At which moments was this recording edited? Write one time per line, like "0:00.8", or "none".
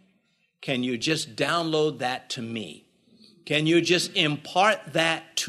none